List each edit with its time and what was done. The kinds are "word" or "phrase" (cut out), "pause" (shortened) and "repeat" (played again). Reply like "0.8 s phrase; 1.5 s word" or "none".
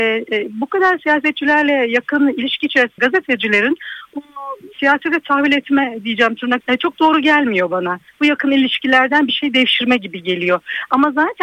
3.0 s word; 4.1 s word; 6.6 s word